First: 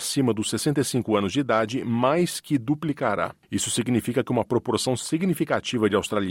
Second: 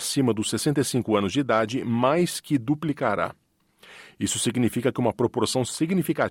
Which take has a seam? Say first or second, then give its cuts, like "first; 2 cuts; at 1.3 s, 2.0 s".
first; 1 cut; at 3.4 s